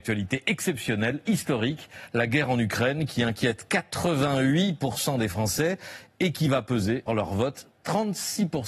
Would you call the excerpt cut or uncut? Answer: cut